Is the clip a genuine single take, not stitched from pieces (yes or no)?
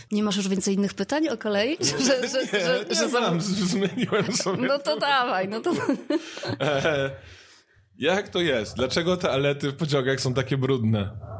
yes